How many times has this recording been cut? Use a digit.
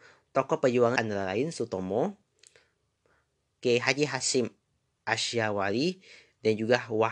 1